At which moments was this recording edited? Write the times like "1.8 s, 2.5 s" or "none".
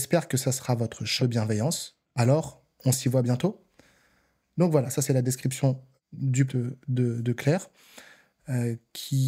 1.2 s, 6.5 s